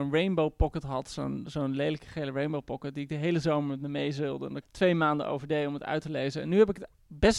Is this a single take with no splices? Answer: no; 1 cut; at 4.6 s

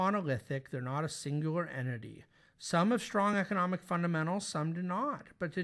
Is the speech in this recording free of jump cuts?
yes; 0 cuts

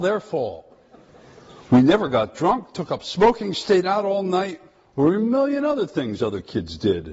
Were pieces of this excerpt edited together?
no; 0 cuts

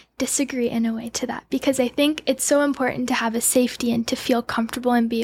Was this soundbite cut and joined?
no; 0 cuts

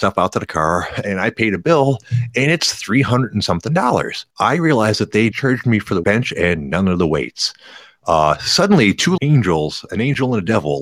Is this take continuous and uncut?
no; 4 cuts; at 4.3 s, 5.3 s, 6.0 s, 9.2 s

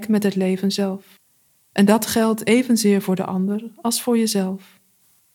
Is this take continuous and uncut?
yes; 0 cuts

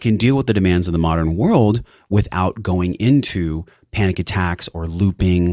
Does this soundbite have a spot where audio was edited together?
no; 0 cuts

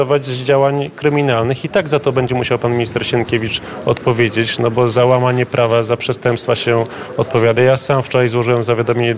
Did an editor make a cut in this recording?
no; 0 cuts

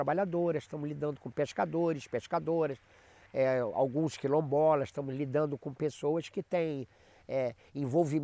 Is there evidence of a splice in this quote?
no; 0 cuts

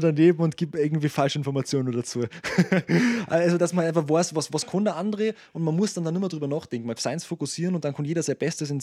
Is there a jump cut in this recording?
yes; 1 cut; at 7.0 s

